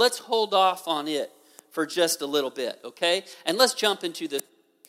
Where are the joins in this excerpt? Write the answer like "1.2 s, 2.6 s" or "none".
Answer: none